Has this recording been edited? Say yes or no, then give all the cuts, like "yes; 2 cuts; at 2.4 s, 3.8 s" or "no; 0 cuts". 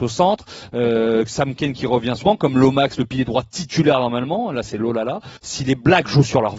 yes; 2 cuts; at 2.2 s, 5.4 s